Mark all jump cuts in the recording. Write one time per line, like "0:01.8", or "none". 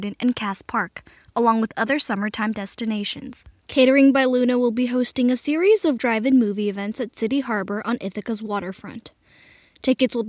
0:06.0